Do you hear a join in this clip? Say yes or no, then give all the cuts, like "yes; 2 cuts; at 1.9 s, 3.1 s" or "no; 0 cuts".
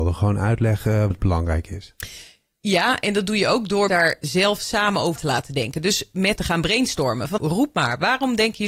yes; 6 cuts; at 1.1 s, 3.9 s, 4.2 s, 5.2 s, 6.4 s, 7.4 s